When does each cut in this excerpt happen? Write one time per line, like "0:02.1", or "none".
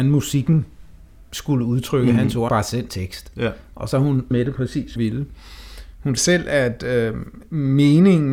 0:02.5
0:02.9
0:04.3
0:05.0
0:06.2